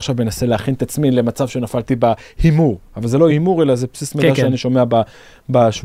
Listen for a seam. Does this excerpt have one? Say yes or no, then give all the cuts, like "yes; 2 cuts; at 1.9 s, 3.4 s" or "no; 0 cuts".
no; 0 cuts